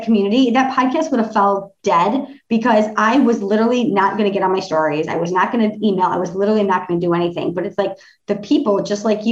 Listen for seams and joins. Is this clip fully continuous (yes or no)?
yes